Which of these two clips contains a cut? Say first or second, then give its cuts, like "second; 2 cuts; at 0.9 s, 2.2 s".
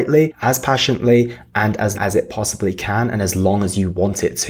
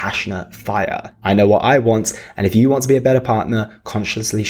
first; 1 cut; at 1.9 s